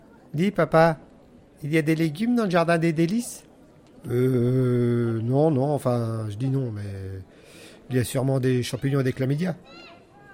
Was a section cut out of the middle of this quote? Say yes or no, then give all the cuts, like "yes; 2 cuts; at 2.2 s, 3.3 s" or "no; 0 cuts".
no; 0 cuts